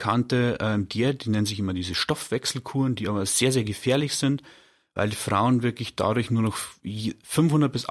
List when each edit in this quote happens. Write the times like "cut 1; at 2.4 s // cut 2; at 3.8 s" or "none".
none